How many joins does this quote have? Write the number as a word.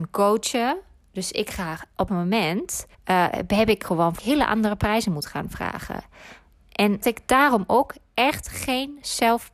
four